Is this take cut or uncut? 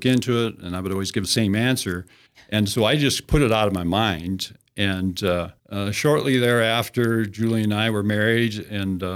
cut